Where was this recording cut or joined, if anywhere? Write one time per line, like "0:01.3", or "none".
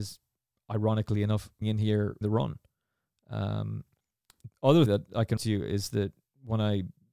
0:01.6
0:02.2
0:04.5
0:04.9
0:05.4